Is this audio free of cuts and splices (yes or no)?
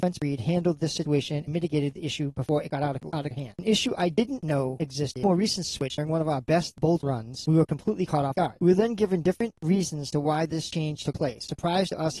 yes